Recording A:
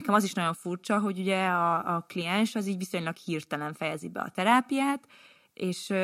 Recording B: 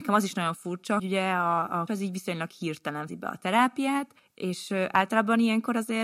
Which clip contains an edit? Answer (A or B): B